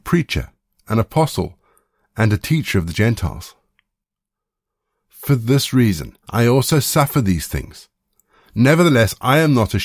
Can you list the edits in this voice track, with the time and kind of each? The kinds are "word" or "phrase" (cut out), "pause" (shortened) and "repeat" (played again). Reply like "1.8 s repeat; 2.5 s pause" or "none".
6.2 s pause